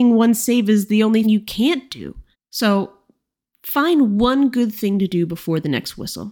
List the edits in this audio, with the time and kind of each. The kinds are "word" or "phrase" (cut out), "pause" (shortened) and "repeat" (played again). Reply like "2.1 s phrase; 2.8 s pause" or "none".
1.2 s word; 2.3 s pause